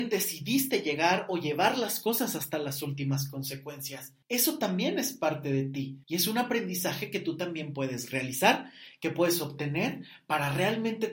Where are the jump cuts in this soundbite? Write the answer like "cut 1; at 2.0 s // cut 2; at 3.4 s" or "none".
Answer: cut 1; at 4.2 s // cut 2; at 6.0 s